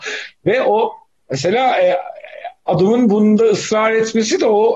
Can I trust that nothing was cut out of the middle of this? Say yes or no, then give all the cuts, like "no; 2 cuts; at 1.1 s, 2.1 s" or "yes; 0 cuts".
yes; 0 cuts